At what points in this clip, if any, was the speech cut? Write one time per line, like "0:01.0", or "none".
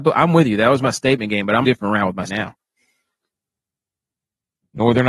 0:01.6
0:02.3